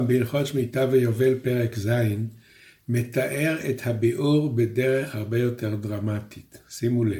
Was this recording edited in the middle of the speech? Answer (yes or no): no